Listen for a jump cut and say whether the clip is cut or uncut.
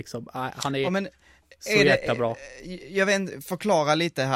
uncut